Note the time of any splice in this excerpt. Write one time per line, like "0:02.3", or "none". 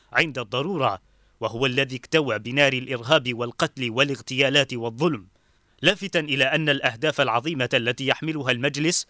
none